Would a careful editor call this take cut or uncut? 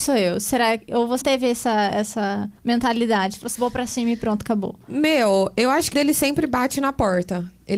cut